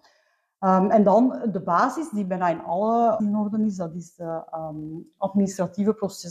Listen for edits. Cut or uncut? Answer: cut